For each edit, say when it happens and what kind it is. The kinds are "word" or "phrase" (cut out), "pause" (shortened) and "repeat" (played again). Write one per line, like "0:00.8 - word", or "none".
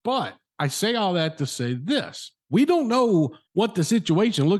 0:02.4 - pause
0:03.5 - pause

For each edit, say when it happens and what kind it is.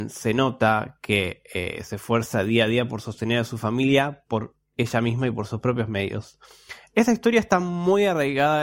none

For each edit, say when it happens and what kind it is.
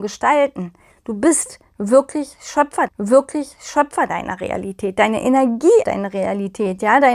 0:02.9 - repeat
0:05.8 - word

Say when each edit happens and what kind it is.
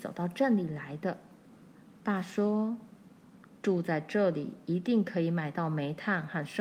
0:01.7 - pause

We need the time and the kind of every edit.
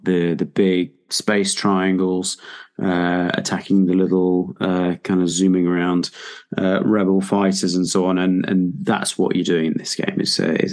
none

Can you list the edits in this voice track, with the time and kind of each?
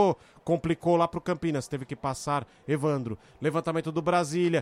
none

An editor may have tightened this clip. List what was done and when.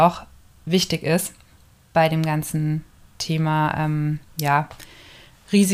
none

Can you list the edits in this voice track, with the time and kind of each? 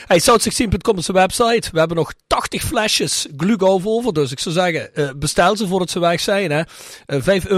none

